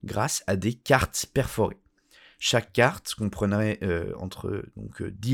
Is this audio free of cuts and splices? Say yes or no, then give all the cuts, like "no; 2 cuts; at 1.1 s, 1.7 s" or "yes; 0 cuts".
yes; 0 cuts